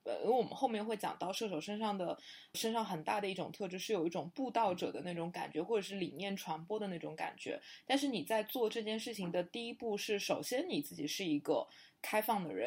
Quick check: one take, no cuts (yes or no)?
no